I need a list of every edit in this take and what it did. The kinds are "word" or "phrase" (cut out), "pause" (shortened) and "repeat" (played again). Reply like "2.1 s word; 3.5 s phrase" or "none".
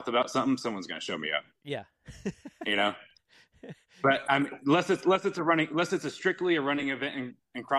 none